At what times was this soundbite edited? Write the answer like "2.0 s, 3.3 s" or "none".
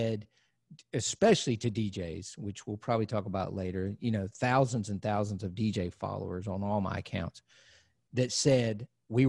none